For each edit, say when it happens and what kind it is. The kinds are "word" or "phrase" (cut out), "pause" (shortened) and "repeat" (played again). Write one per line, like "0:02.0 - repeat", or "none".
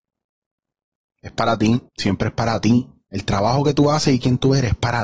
0:01.9 - pause